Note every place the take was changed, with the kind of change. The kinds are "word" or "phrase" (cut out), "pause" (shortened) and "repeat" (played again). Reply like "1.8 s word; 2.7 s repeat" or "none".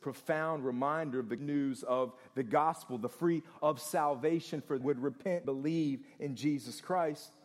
1.4 s word; 3.6 s word; 4.8 s phrase; 5.4 s word